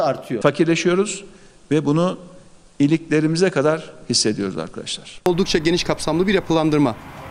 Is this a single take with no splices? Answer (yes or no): yes